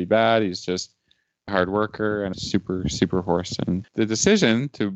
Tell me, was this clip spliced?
yes; 3 cuts; at 1.5 s, 2.3 s, 3.8 s

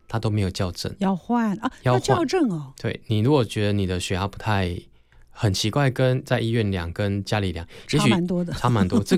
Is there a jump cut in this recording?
no; 0 cuts

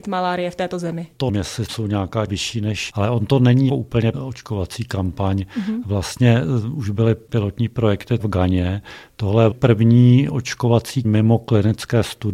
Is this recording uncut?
no; 9 cuts; at 1.3 s, 1.7 s, 2.3 s, 2.9 s, 3.7 s, 4.1 s, 8.2 s, 9.5 s, 11.0 s

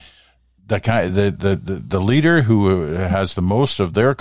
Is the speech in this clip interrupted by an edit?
no; 0 cuts

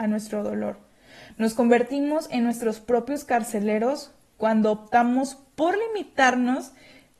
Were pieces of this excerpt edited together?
no; 0 cuts

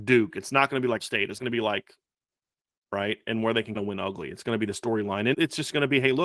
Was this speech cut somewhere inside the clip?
yes; 5 cuts; at 1.0 s, 1.4 s, 2.7 s, 3.7 s, 5.3 s

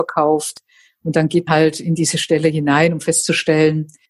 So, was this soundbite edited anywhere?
yes; 1 cut; at 1.5 s

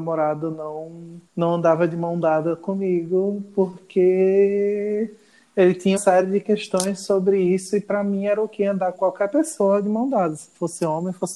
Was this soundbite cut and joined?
yes; 3 cuts; at 1.3 s, 6.0 s, 8.9 s

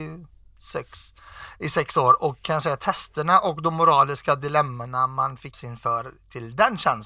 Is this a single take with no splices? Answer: no; 1 cut; at 5.5 s

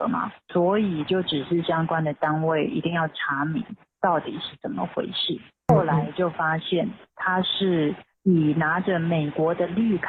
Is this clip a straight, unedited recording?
no; 2 cuts; at 7.1 s, 8.1 s

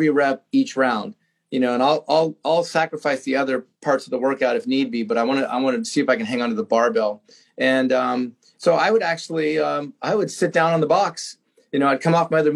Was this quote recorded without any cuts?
yes; 0 cuts

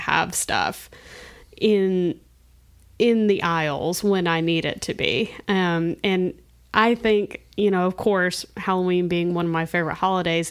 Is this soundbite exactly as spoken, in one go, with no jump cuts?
yes; 0 cuts

